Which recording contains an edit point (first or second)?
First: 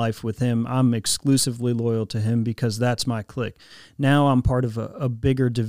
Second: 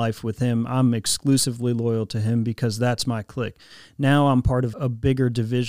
second